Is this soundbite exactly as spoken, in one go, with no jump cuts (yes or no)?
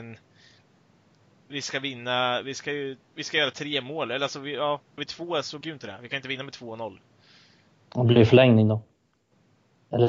no